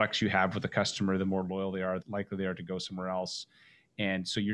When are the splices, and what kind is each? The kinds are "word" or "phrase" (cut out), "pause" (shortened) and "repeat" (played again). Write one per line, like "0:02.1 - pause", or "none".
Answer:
0:02.0 - word

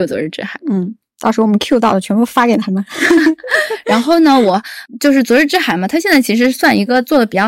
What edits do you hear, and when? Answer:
none

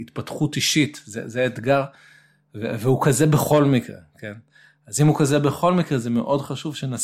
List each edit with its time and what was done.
none

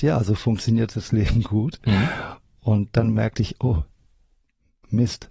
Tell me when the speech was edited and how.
none

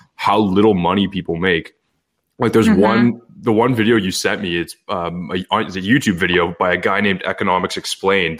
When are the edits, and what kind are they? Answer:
none

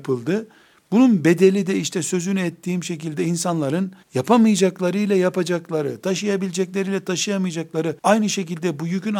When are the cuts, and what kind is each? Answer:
0:04.0 - pause
0:08.0 - pause

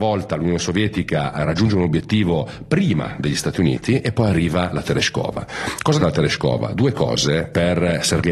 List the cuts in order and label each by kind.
0:06.0 - word

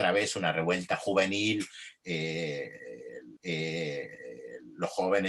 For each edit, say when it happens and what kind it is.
0:03.4 - repeat

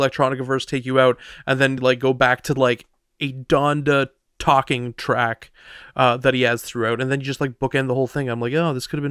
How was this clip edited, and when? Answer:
none

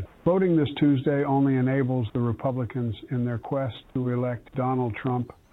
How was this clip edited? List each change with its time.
0:04.5 - pause

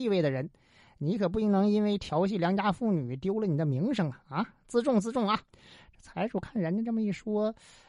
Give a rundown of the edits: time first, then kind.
0:05.5 - pause

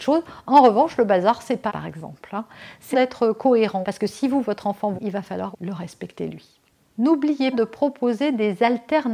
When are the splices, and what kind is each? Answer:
0:01.7 - word
0:02.9 - word
0:03.8 - word
0:04.4 - word
0:04.9 - word
0:05.5 - word
0:07.5 - word

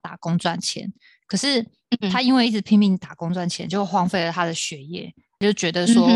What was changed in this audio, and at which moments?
none

